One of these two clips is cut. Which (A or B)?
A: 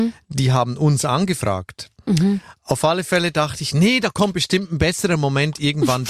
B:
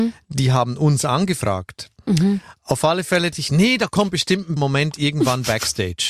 B